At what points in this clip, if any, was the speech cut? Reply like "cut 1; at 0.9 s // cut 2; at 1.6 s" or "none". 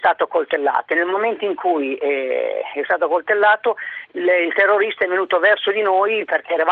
none